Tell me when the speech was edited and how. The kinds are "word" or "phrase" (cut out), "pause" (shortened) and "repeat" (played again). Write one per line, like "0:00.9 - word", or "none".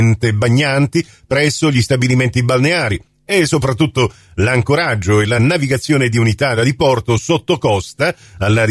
none